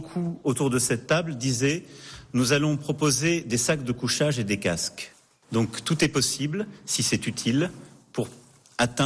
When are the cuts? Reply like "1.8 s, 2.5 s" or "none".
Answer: none